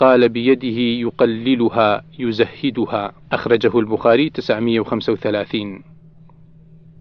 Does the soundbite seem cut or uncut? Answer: cut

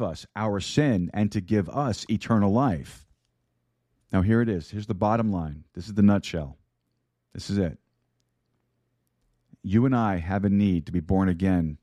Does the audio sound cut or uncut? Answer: cut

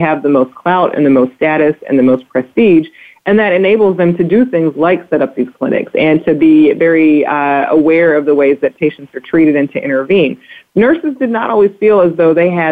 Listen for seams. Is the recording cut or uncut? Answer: uncut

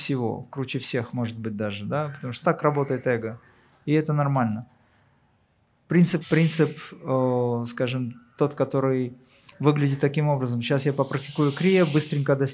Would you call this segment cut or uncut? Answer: cut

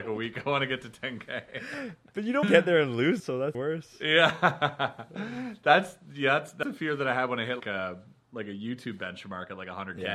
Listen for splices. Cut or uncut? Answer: cut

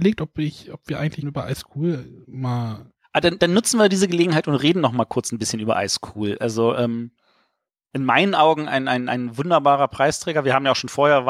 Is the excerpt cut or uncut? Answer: cut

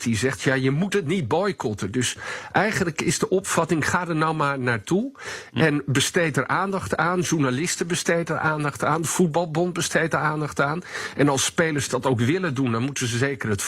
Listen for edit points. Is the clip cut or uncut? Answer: uncut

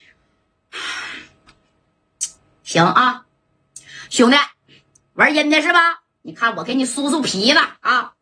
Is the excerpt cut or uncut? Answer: uncut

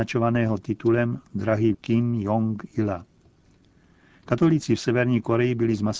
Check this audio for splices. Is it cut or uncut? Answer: cut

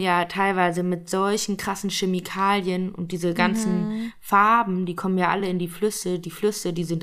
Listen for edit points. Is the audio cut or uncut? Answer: uncut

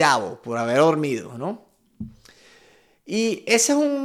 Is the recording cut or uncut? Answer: uncut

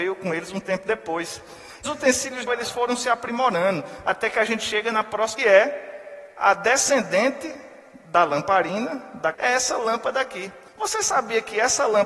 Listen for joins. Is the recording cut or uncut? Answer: cut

